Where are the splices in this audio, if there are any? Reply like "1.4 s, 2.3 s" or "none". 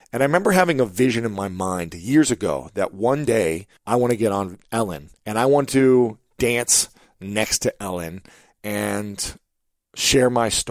3.8 s, 5.2 s